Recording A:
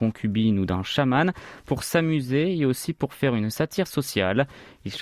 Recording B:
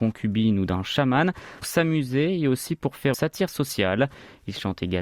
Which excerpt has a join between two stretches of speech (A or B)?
B